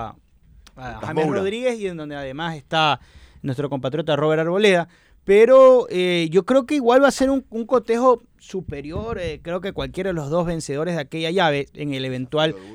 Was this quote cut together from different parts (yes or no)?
no